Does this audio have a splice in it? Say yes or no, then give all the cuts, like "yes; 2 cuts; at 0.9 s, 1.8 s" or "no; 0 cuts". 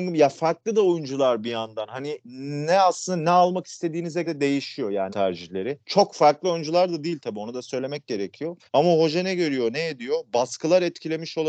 yes; 4 cuts; at 4.2 s, 5.1 s, 5.8 s, 8.7 s